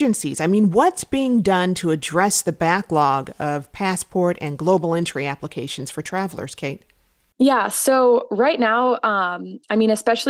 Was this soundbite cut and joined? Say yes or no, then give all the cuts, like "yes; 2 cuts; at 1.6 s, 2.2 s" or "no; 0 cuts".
no; 0 cuts